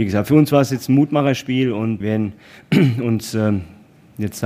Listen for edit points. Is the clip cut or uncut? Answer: cut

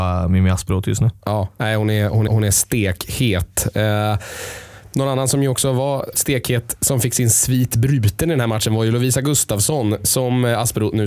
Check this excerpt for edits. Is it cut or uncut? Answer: cut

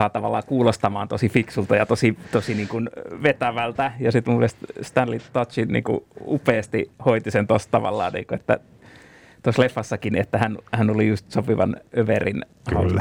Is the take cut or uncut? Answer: uncut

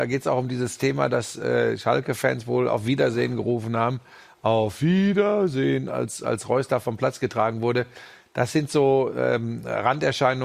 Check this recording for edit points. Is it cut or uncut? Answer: uncut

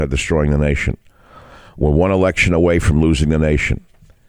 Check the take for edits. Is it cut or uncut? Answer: uncut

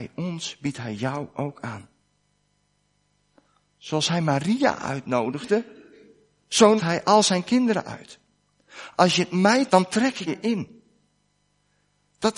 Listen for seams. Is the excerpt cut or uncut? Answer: cut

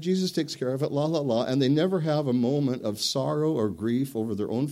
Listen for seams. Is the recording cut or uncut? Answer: uncut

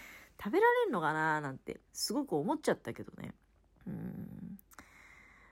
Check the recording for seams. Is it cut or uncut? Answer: cut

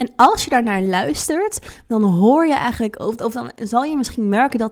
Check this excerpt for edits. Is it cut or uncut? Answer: uncut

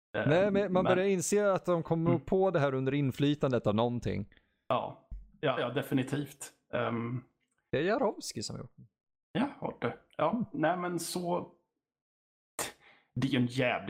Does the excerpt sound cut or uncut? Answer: cut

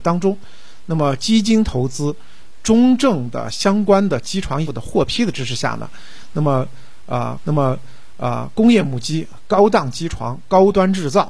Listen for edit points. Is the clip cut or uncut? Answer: cut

